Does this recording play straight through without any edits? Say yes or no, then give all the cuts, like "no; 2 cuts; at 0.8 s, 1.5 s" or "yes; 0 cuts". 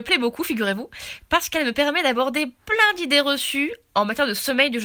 yes; 0 cuts